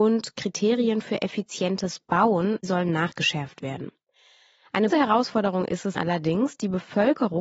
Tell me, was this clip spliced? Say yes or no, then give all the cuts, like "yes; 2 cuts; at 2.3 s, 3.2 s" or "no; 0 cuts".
yes; 2 cuts; at 4.9 s, 6.0 s